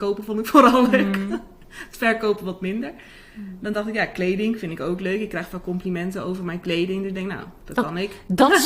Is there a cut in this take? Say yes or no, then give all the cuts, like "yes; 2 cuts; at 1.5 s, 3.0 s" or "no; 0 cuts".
no; 0 cuts